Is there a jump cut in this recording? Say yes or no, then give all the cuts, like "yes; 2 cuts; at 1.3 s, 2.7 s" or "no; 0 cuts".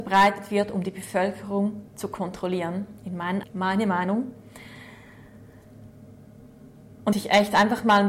yes; 3 cuts; at 1.9 s, 3.4 s, 7.1 s